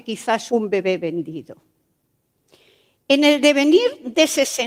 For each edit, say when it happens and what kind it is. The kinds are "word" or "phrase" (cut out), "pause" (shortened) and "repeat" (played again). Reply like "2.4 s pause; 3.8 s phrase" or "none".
none